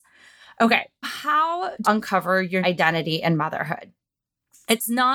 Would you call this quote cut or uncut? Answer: cut